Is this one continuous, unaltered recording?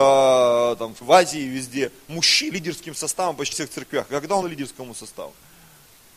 no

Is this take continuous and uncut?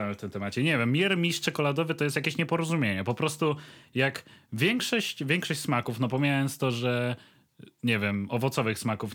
yes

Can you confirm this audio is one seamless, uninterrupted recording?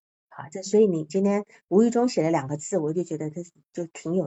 yes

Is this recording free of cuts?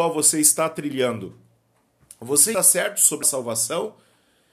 no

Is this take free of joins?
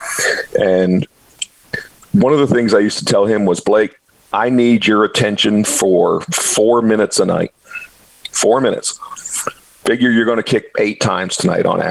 no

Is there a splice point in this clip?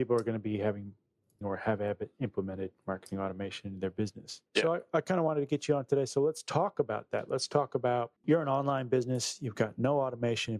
yes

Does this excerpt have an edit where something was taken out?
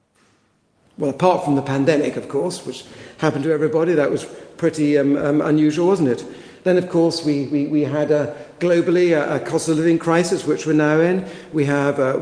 no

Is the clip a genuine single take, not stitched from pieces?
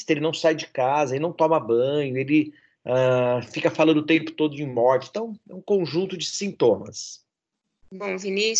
yes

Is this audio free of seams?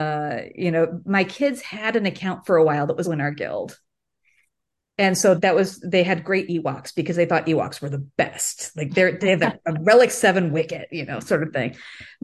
no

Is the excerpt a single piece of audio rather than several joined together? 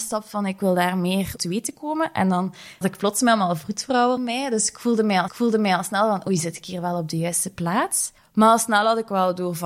no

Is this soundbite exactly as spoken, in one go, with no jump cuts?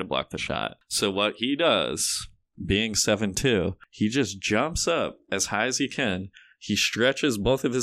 yes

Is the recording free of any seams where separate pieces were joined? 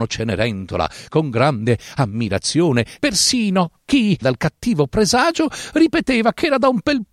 no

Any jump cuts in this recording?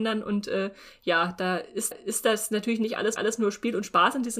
yes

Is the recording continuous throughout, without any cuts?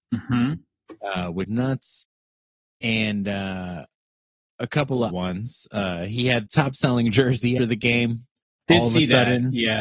no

